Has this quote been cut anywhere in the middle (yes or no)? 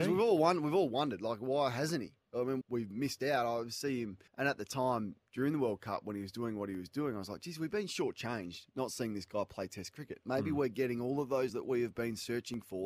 yes